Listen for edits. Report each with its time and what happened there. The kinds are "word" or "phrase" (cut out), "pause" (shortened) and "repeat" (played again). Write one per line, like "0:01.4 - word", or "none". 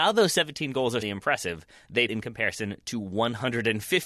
0:01.0 - word
0:02.1 - word